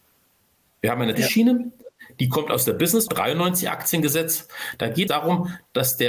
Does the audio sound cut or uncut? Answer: cut